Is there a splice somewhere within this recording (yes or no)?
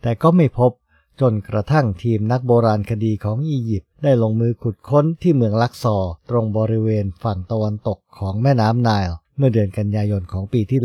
yes